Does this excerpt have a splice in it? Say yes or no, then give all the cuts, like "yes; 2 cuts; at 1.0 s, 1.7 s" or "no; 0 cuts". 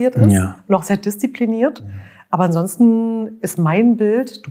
no; 0 cuts